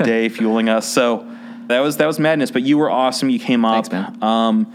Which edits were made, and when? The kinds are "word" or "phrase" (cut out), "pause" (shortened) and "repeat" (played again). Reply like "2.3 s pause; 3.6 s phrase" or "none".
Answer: 1.7 s word